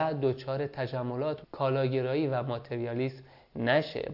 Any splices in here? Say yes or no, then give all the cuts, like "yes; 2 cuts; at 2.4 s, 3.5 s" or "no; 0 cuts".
yes; 1 cut; at 1.4 s